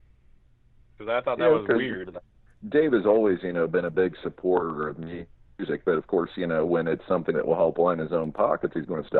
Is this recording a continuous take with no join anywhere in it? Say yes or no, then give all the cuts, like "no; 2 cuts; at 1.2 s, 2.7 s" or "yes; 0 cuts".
no; 1 cut; at 2.5 s